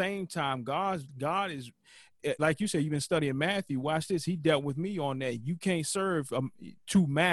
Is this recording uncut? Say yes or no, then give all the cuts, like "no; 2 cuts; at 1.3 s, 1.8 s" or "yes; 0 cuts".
no; 2 cuts; at 1.1 s, 2.4 s